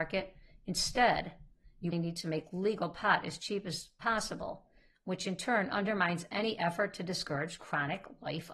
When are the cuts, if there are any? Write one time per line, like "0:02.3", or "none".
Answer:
0:01.9